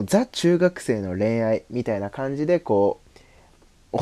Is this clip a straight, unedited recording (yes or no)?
no